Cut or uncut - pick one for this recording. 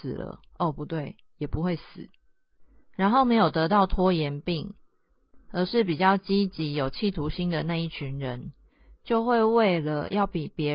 uncut